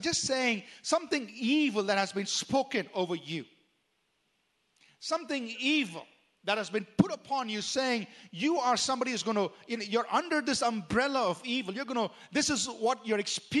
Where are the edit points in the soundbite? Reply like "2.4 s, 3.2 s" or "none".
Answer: none